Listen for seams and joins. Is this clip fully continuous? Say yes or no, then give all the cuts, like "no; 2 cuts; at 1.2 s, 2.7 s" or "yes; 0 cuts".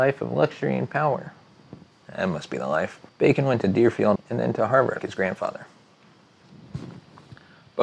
no; 4 cuts; at 1.9 s, 3.1 s, 4.2 s, 5.0 s